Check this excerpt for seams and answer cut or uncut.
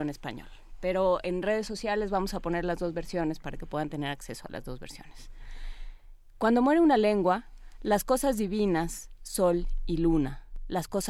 cut